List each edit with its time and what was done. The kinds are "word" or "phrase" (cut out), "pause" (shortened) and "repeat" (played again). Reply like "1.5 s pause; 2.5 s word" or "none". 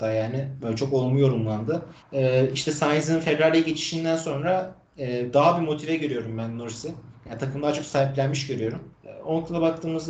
2.0 s pause; 8.9 s pause